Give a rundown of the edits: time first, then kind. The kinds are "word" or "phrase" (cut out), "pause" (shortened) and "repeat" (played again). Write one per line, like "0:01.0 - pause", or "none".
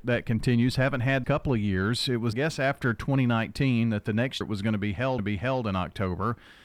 0:01.2 - phrase
0:02.3 - phrase
0:04.4 - word
0:05.2 - repeat